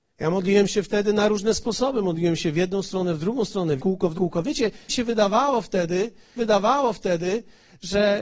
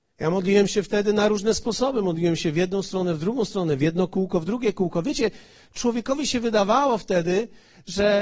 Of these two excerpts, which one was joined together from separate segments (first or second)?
first